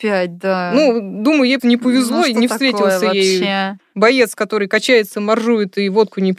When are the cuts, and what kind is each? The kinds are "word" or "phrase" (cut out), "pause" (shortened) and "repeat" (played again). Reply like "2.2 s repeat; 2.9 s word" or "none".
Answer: 1.6 s word